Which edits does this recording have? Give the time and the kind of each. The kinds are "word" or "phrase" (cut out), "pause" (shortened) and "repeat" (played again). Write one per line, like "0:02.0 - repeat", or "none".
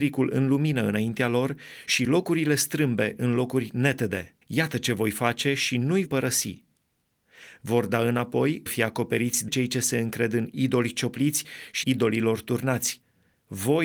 0:04.4 - pause
0:06.1 - word
0:08.7 - word
0:09.5 - word
0:11.8 - word

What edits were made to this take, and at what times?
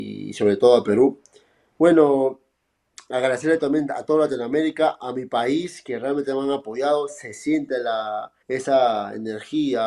0:08.4 - pause

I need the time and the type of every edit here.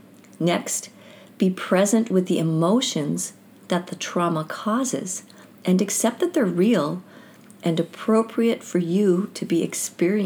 none

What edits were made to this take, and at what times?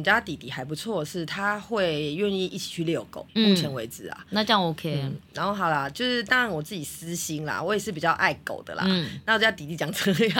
0:03.3 - pause

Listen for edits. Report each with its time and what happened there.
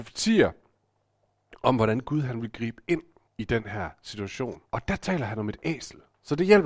0:03.2 - pause
0:04.7 - pause

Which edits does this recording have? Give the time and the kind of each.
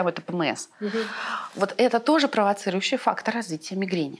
none

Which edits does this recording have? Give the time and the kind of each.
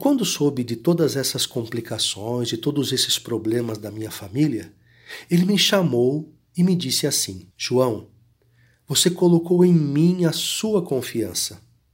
0:07.5 - pause

